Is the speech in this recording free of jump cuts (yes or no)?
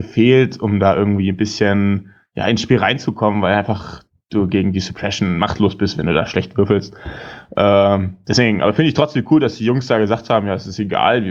yes